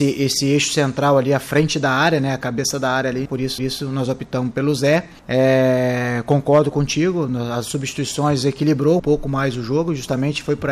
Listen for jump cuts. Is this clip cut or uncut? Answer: cut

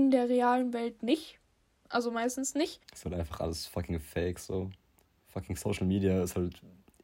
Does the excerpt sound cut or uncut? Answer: cut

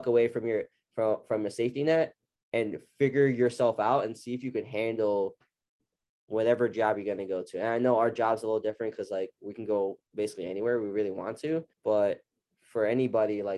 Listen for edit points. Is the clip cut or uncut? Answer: cut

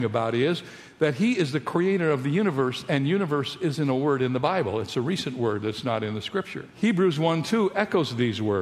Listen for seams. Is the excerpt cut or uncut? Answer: uncut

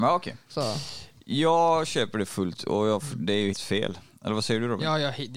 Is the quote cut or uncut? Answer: cut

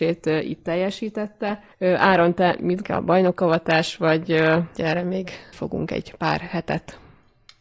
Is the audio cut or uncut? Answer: cut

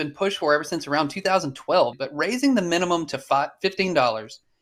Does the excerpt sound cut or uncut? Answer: cut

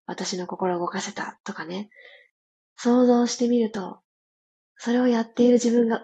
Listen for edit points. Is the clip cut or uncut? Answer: uncut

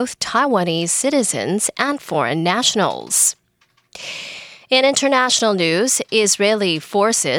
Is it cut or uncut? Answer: uncut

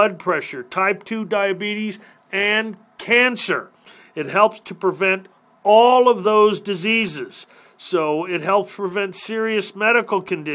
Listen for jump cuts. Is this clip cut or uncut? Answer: uncut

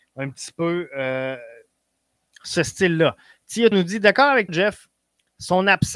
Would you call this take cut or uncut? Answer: cut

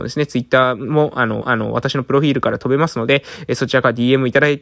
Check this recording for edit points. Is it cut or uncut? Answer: cut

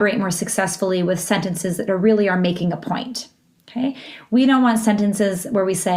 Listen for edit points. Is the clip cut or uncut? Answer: uncut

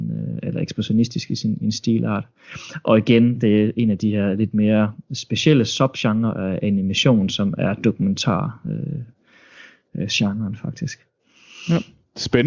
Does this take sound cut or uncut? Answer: uncut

